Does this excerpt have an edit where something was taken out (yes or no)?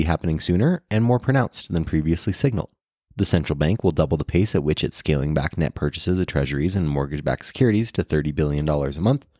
yes